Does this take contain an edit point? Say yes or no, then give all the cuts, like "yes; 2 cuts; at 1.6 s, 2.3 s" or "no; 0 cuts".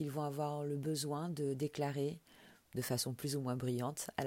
no; 0 cuts